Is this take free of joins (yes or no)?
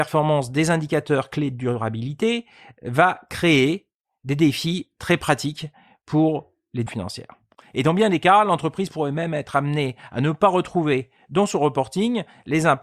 no